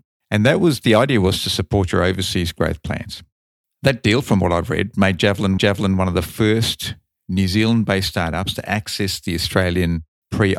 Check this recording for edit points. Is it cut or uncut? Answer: cut